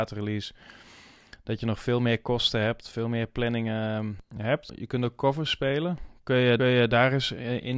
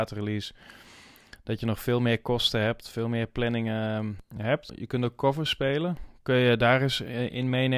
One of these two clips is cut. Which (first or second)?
first